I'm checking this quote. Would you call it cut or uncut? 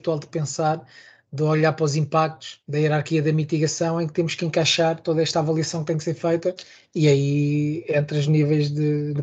cut